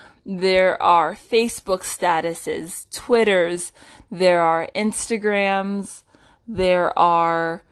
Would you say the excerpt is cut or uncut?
uncut